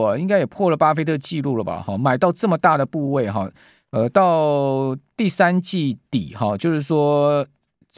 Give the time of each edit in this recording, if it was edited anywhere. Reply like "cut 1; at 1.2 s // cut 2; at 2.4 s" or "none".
none